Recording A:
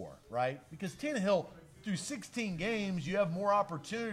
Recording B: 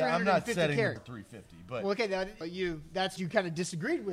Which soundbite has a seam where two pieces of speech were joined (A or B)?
B